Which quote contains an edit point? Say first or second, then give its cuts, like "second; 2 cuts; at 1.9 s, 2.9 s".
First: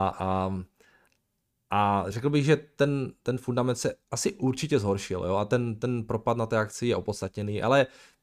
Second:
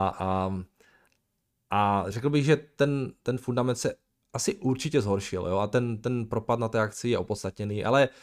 first; 1 cut; at 4.0 s